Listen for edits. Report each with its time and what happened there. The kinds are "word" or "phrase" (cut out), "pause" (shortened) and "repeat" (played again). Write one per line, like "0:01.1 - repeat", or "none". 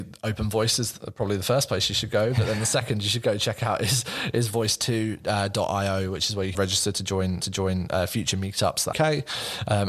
0:06.5 - phrase
0:07.4 - repeat
0:08.9 - phrase